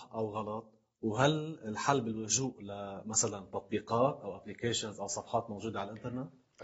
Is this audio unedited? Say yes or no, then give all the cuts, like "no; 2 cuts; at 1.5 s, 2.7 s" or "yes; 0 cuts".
yes; 0 cuts